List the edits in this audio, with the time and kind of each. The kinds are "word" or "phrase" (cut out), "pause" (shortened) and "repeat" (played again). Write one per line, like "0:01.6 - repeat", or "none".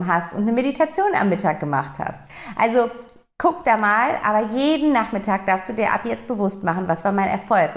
none